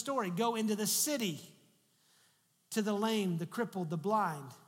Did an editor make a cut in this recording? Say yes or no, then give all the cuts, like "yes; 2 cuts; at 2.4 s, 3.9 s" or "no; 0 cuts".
no; 0 cuts